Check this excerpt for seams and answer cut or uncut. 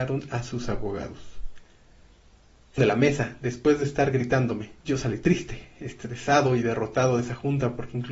cut